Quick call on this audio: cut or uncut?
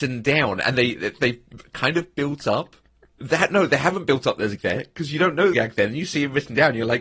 cut